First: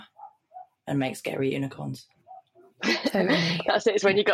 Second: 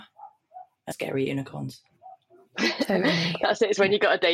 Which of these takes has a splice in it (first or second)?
second